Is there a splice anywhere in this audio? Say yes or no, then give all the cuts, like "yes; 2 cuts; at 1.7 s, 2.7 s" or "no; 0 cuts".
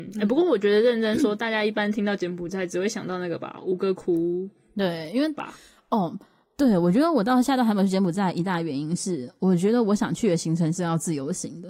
no; 0 cuts